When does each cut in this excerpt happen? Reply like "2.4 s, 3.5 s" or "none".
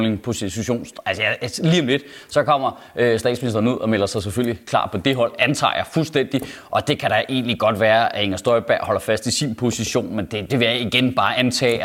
10.5 s